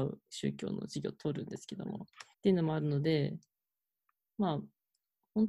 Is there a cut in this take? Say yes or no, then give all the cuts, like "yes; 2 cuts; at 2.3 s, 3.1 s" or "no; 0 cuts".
yes; 1 cut; at 2.3 s